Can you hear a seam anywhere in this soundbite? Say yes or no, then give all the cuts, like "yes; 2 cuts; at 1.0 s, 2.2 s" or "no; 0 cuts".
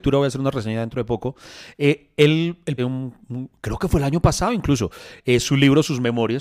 yes; 1 cut; at 2.8 s